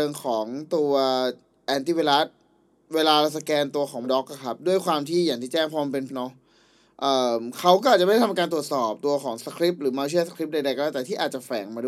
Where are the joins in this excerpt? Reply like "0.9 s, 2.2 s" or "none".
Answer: 4.0 s, 6.1 s